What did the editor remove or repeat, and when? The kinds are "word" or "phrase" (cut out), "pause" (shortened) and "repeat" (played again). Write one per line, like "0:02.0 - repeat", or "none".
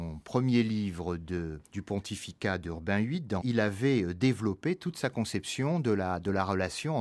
0:01.6 - pause
0:03.4 - word